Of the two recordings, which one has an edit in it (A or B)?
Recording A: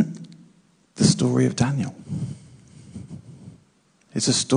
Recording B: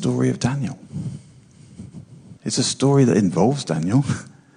B